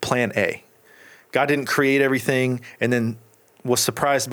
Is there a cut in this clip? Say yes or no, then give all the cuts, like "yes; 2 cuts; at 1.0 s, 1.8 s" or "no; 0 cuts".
no; 0 cuts